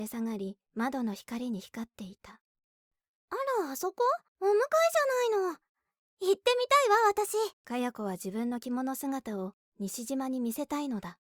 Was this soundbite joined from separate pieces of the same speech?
yes; 2 cuts; at 4.3 s, 7.6 s

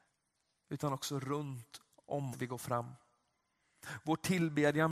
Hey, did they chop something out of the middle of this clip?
yes; 1 cut; at 2.3 s

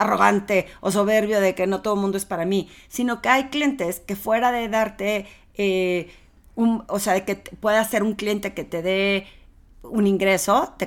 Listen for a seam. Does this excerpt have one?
no; 0 cuts

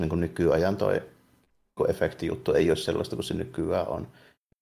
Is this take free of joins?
yes; 0 cuts

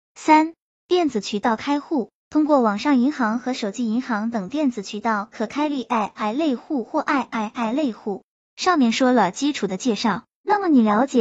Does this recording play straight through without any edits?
yes; 0 cuts

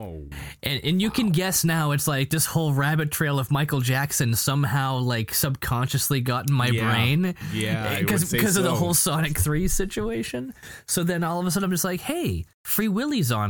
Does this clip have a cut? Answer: yes; 1 cut; at 12.5 s

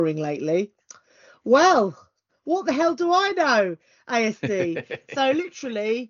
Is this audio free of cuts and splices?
yes; 0 cuts

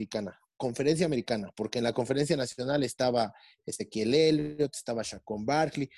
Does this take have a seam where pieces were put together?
no; 0 cuts

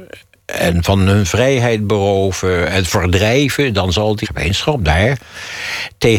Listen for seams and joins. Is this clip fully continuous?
no; 1 cut; at 4.2 s

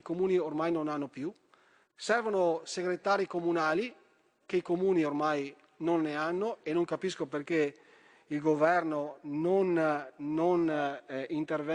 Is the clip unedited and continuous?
yes; 0 cuts

